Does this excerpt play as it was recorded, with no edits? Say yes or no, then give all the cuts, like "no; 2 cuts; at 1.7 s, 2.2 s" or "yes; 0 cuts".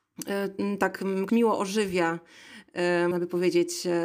no; 2 cuts; at 1.3 s, 3.1 s